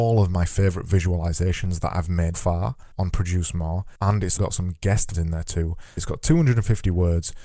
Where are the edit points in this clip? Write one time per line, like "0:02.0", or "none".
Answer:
0:02.3
0:02.9
0:04.0
0:04.4
0:05.1
0:06.0